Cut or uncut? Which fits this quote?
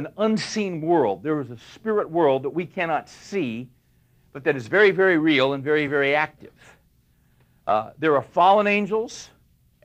uncut